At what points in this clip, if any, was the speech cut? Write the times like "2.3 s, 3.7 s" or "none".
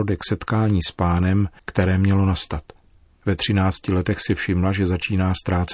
none